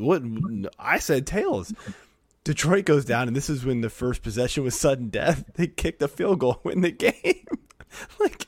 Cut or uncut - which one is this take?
uncut